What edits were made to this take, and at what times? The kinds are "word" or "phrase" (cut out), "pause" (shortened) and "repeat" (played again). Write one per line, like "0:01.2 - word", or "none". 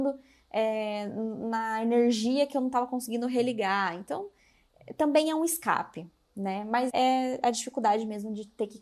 0:06.9 - word